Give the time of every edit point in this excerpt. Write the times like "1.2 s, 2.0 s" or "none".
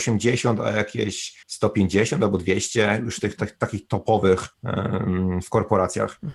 1.4 s, 4.5 s